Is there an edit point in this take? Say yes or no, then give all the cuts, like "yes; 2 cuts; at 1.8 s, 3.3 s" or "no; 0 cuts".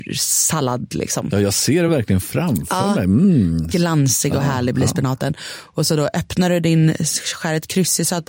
no; 0 cuts